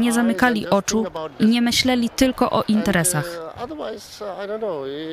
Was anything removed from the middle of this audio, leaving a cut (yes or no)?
no